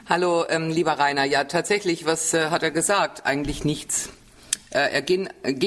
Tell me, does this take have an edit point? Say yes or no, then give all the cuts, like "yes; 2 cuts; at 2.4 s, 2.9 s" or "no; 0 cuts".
no; 0 cuts